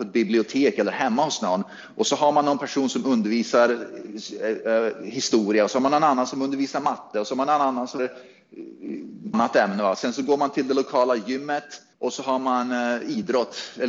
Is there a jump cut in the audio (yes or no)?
yes